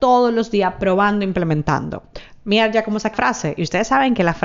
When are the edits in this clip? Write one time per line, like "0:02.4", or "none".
0:03.1